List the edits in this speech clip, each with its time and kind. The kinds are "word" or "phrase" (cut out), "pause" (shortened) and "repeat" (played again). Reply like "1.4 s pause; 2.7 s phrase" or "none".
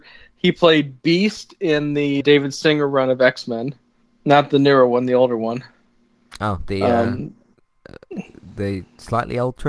2.2 s word; 4.0 s pause